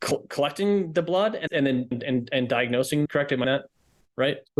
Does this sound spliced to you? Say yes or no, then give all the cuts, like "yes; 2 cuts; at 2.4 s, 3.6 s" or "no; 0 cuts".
yes; 4 cuts; at 1.5 s, 1.9 s, 3.1 s, 3.4 s